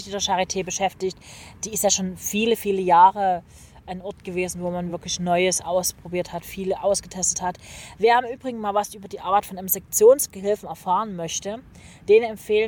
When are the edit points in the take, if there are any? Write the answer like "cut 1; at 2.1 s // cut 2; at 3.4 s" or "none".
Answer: none